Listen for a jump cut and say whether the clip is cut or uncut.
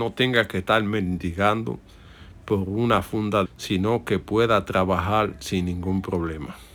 cut